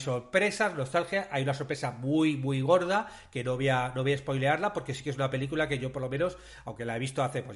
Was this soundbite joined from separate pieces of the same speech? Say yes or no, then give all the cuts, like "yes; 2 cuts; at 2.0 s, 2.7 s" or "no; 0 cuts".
no; 0 cuts